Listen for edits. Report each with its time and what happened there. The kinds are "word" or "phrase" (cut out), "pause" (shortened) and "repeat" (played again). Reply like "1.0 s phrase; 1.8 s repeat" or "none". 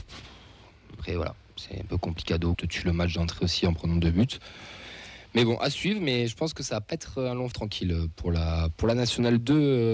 2.5 s phrase; 7.5 s word